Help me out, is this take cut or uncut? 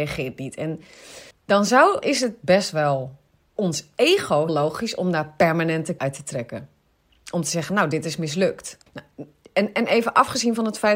cut